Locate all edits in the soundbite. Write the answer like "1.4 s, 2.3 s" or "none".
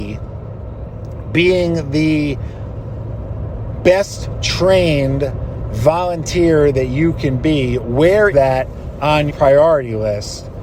8.3 s, 9.3 s